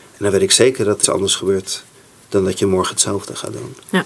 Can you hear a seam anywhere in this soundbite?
yes; 2 cuts; at 1.0 s, 1.9 s

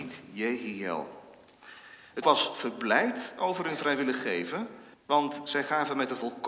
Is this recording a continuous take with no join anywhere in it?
no; 2 cuts; at 2.2 s, 4.9 s

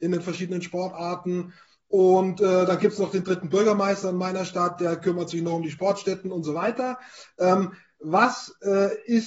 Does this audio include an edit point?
no; 0 cuts

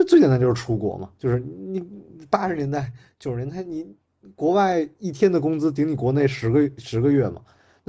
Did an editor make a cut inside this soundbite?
no; 0 cuts

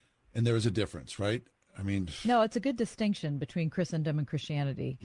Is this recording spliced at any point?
no; 0 cuts

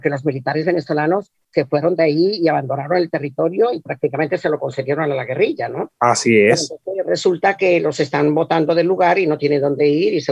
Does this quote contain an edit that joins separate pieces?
no; 0 cuts

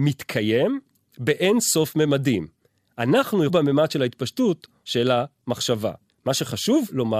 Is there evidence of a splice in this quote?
yes; 3 cuts; at 3.5 s, 4.8 s, 6.1 s

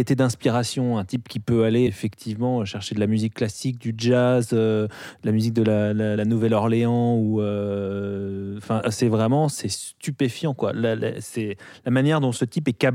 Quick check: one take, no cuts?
no; 3 cuts; at 1.9 s, 6.2 s, 8.8 s

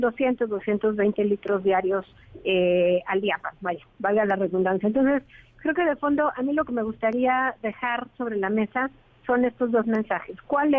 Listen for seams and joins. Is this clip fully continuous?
yes; 0 cuts

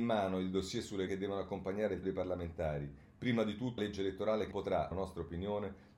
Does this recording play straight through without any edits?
no; 5 cuts; at 1.1 s, 2.0 s, 3.8 s, 4.5 s, 4.9 s

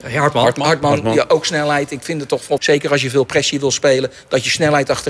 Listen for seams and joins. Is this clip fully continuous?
no; 1 cut; at 2.6 s

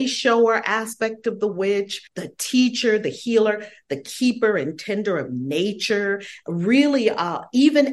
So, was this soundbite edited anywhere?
yes; 1 cut; at 2.1 s

